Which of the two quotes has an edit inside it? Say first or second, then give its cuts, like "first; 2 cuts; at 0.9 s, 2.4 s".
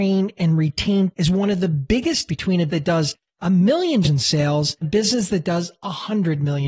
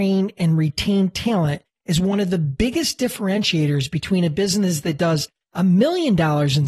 first; 5 cuts; at 1.1 s, 2.3 s, 2.7 s, 4.0 s, 4.8 s